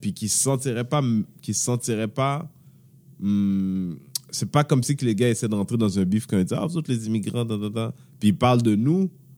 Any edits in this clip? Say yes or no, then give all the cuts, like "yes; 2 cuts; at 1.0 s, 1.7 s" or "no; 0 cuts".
no; 0 cuts